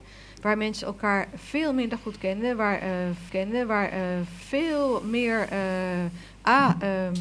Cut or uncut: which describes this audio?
cut